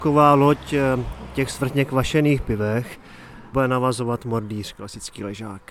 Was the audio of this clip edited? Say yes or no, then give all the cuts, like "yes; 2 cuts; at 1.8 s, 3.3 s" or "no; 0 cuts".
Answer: yes; 1 cut; at 3.5 s